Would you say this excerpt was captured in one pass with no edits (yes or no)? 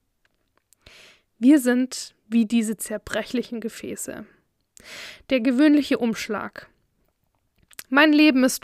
yes